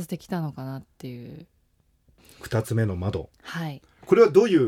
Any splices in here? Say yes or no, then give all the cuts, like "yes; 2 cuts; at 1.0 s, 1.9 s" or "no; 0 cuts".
no; 0 cuts